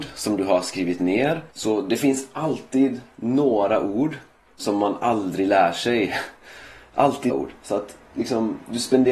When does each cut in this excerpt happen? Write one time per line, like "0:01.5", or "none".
0:01.5
0:04.6
0:07.3